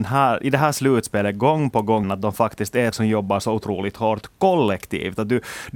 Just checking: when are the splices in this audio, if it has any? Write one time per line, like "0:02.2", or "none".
0:02.0
0:02.9